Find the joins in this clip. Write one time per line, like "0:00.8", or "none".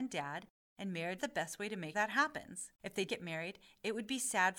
0:01.2
0:01.9
0:02.7
0:03.1